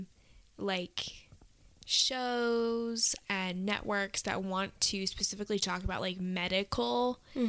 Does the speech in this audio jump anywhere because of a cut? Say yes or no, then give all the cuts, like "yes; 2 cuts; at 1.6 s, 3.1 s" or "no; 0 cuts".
no; 0 cuts